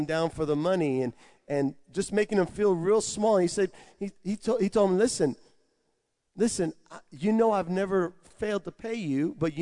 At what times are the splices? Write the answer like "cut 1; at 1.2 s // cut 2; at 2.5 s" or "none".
none